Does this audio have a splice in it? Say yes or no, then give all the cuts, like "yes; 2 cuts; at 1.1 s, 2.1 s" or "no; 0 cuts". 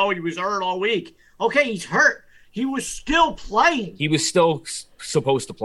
no; 0 cuts